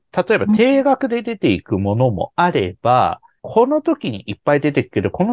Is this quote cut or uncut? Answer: cut